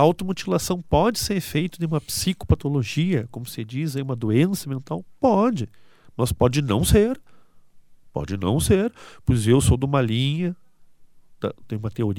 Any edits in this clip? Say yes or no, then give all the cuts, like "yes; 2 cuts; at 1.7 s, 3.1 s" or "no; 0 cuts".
no; 0 cuts